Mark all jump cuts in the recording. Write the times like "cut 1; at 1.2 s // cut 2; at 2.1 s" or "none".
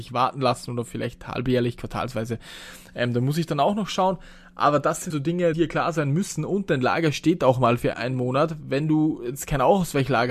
cut 1; at 5.1 s // cut 2; at 5.5 s // cut 3; at 7.9 s